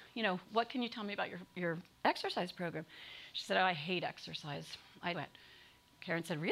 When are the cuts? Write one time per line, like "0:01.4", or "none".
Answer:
0:05.1